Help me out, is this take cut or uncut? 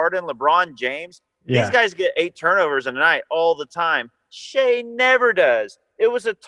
uncut